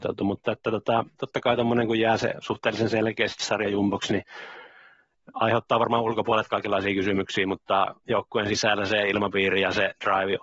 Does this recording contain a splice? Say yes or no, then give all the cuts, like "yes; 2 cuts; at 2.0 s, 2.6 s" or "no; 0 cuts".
yes; 1 cut; at 8.0 s